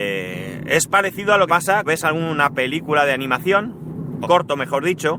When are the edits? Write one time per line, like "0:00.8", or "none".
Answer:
0:01.5
0:01.8
0:04.2